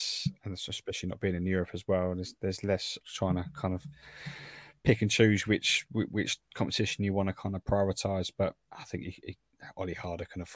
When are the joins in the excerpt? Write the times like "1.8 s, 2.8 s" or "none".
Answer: 3.0 s, 8.6 s

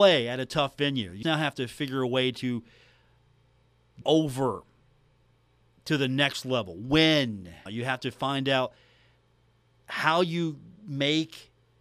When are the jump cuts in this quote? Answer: 1.2 s, 4.0 s, 7.7 s

